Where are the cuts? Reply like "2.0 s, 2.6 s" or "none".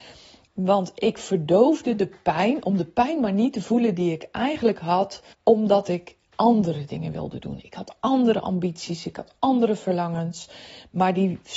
5.3 s